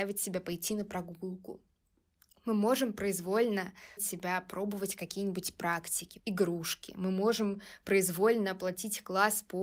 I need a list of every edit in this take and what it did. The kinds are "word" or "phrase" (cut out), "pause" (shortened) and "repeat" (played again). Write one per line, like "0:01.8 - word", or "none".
0:04.0 - word
0:06.2 - word